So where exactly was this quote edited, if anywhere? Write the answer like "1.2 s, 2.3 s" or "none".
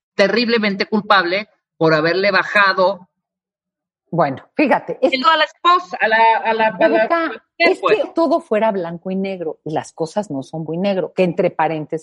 5.2 s, 8.0 s, 10.7 s